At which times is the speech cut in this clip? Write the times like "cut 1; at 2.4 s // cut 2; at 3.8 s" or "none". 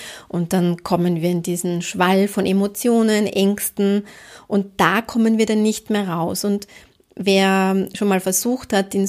none